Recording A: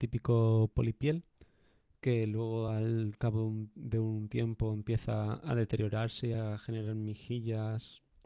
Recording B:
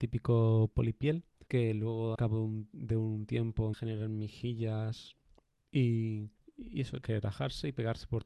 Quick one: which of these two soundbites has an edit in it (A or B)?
B